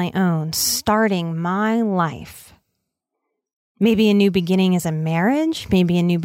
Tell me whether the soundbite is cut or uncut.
uncut